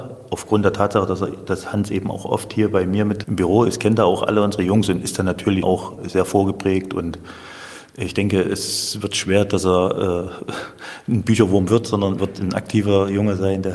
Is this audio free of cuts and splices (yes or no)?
no